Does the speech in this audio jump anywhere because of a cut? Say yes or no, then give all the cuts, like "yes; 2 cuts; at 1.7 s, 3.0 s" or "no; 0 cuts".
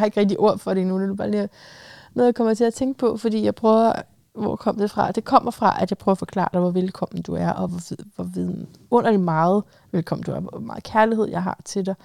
no; 0 cuts